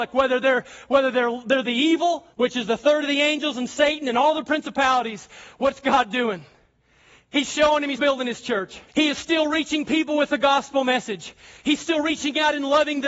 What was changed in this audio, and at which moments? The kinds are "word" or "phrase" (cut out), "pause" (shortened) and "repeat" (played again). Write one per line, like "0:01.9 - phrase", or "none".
0:02.3 - pause
0:08.0 - word
0:08.9 - pause